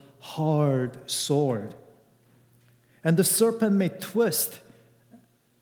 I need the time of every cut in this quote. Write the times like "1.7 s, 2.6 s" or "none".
none